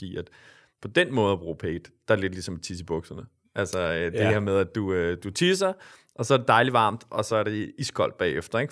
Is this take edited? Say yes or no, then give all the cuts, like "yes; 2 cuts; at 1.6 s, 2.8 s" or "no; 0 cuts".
no; 0 cuts